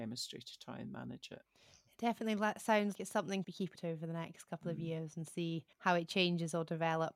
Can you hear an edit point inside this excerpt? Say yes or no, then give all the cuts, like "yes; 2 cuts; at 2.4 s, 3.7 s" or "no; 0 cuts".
yes; 5 cuts; at 1.5 s, 3.0 s, 3.4 s, 3.8 s, 5.7 s